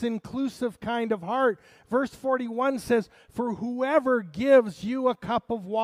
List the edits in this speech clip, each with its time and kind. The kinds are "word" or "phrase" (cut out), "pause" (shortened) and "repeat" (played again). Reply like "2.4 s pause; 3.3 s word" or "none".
none